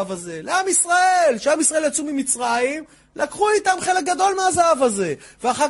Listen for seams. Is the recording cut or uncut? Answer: uncut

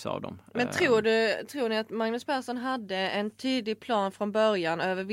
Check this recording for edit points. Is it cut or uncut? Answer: uncut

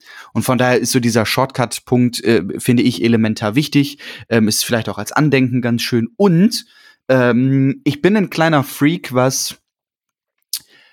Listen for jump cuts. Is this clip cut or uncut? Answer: cut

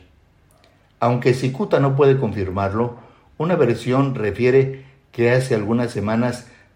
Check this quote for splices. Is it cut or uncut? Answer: uncut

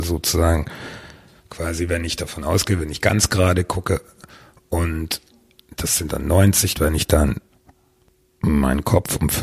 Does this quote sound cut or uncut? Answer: cut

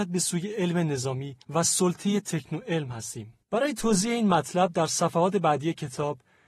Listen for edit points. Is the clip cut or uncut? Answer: cut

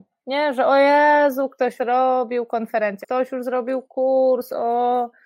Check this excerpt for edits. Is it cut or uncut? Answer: cut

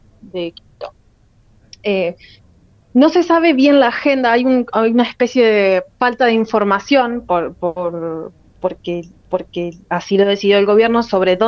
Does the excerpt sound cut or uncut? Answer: cut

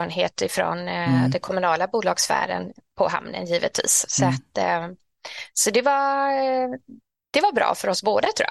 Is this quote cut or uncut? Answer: uncut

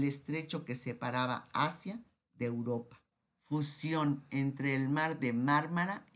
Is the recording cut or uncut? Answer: cut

